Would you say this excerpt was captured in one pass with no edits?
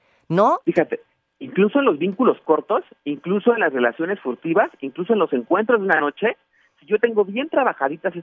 yes; 0 cuts

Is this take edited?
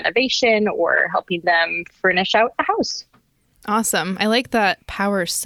no; 0 cuts

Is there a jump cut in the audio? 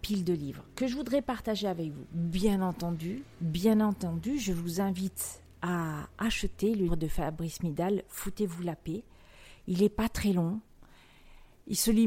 yes; 1 cut; at 6.9 s

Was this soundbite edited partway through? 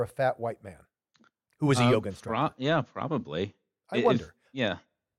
no; 0 cuts

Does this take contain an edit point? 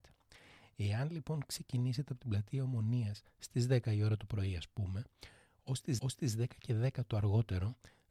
yes; 1 cut; at 6.0 s

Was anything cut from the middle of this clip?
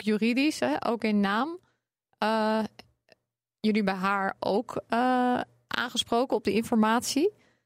no; 0 cuts

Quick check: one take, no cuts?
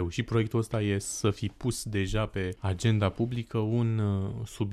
yes; 0 cuts

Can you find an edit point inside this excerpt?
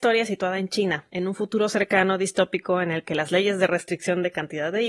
yes; 1 cut; at 1.1 s

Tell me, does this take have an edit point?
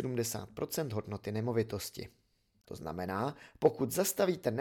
no; 0 cuts

